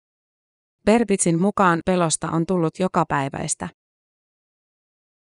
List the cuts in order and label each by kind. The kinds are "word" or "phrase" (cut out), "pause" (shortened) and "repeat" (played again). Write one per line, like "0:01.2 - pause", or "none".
0:01.8 - phrase